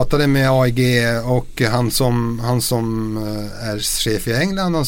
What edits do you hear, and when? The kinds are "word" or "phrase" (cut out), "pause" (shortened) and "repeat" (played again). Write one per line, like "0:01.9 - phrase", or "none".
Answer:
none